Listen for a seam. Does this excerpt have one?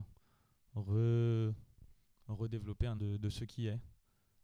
yes; 1 cut; at 3.0 s

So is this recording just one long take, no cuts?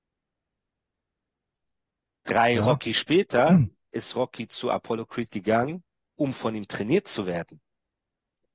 yes; 0 cuts

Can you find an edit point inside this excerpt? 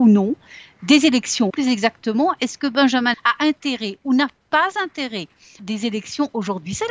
yes; 3 cuts; at 1.5 s, 3.1 s, 5.6 s

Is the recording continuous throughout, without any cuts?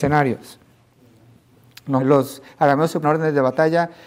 no; 2 cuts; at 2.0 s, 3.0 s

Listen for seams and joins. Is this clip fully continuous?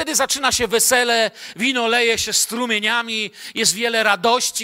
yes; 0 cuts

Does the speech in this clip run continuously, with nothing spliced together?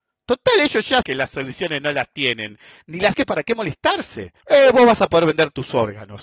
no; 3 cuts; at 1.0 s, 3.1 s, 4.4 s

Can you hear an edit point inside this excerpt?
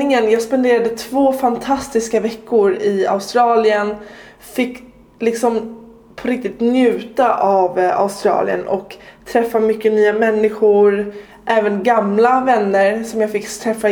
no; 0 cuts

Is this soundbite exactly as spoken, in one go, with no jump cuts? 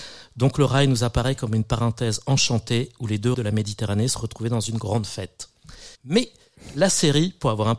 no; 2 cuts; at 3.3 s, 5.9 s

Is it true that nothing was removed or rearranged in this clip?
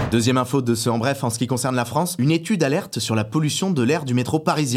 yes; 0 cuts

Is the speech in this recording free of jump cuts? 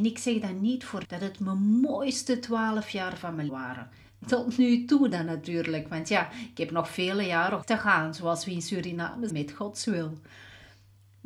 no; 4 cuts; at 1.0 s, 3.5 s, 7.6 s, 9.3 s

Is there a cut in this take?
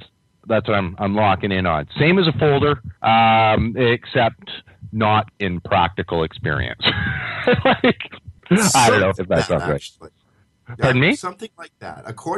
yes; 4 cuts; at 3.0 s, 5.3 s, 8.4 s, 9.2 s

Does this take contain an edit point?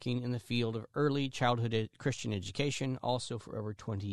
no; 0 cuts

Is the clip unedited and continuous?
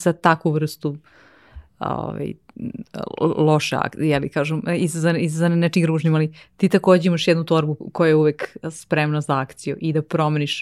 no; 1 cut; at 1.7 s

